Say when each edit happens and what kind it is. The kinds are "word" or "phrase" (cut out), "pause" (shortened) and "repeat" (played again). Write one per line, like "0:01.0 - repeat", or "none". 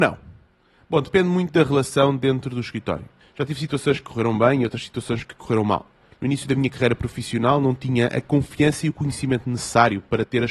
0:03.2 - pause